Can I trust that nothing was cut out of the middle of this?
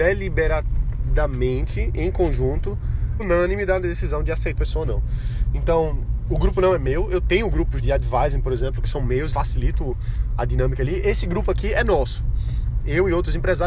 no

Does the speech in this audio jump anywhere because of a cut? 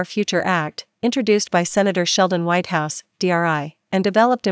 no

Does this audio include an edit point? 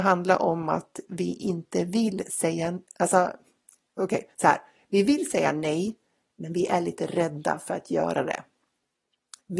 no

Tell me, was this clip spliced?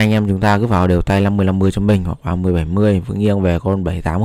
no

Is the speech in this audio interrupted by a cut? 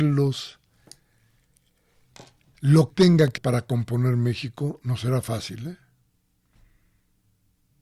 yes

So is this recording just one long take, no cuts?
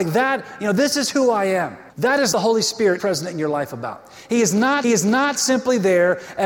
no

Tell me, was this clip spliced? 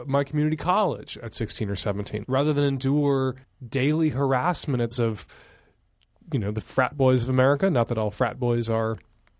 yes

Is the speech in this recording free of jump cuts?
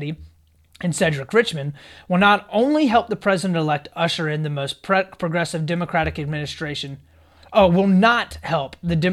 yes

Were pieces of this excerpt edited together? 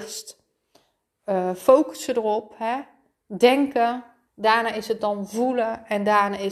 yes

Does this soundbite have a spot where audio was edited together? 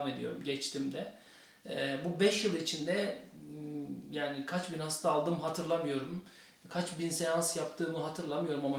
no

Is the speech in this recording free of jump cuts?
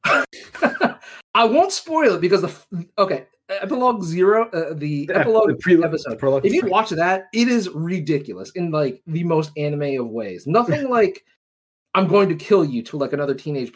no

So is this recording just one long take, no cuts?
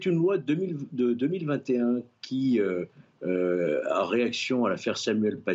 yes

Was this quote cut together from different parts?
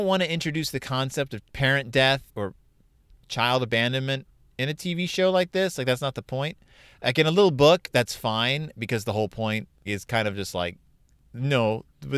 yes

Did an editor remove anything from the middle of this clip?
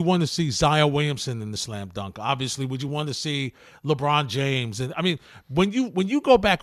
no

